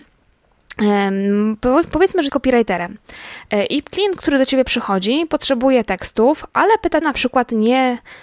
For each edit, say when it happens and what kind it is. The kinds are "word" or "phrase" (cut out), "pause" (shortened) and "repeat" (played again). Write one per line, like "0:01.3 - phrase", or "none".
0:02.3 - word
0:07.0 - phrase